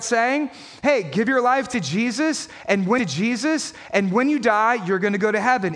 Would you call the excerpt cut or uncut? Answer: cut